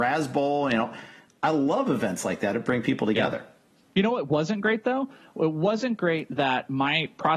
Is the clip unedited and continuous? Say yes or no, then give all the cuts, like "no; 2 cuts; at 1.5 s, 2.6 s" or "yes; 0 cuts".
yes; 0 cuts